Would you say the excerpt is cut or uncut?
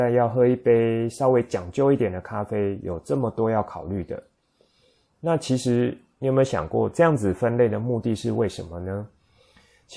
uncut